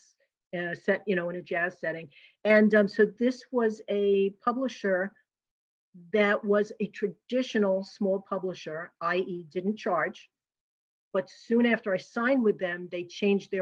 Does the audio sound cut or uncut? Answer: uncut